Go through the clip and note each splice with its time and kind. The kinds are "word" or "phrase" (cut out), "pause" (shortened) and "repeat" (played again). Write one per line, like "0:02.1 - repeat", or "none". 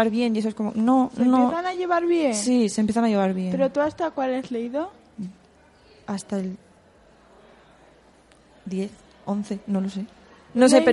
none